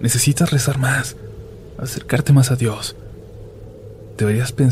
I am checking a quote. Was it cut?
no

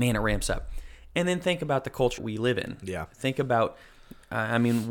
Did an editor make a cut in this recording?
yes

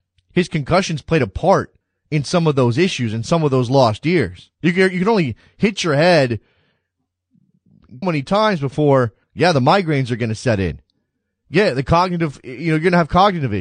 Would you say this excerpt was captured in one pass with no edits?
no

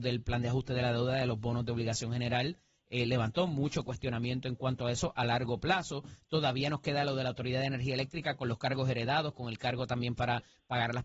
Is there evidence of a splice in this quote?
no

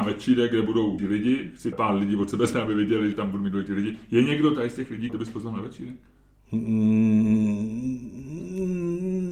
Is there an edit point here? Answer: yes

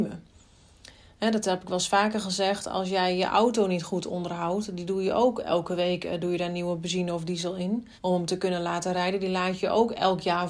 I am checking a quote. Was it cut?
yes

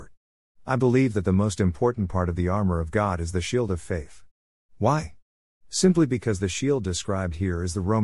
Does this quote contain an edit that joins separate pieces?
no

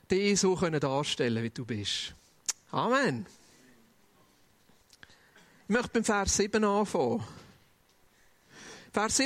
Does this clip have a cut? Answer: no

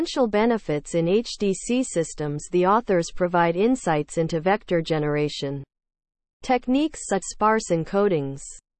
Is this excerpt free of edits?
no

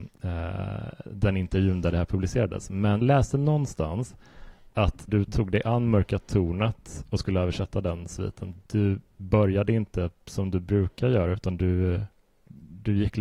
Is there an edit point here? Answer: yes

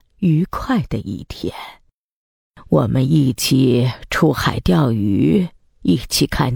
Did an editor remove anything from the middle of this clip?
no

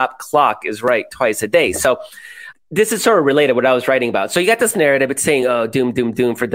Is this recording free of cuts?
yes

